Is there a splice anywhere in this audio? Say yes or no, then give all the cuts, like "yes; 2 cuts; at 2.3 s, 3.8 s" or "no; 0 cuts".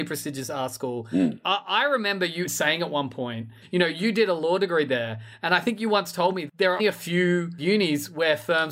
yes; 3 cuts; at 2.4 s, 6.5 s, 6.8 s